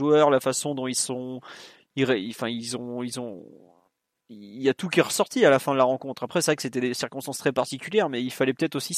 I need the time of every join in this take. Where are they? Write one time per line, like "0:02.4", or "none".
none